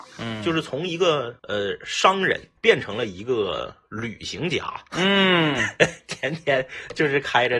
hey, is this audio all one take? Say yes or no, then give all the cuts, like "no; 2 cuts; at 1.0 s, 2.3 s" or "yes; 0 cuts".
no; 2 cuts; at 1.4 s, 2.6 s